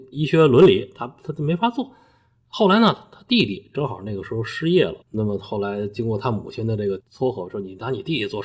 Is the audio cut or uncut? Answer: cut